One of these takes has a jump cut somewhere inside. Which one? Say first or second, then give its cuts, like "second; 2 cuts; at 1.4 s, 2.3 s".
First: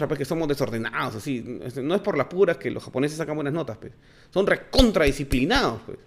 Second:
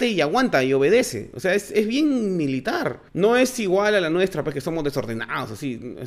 second; 1 cut; at 3.1 s